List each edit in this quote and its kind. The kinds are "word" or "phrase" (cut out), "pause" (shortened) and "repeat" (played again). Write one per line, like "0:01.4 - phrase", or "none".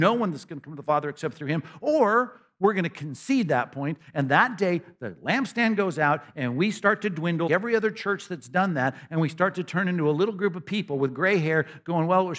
0:07.5 - word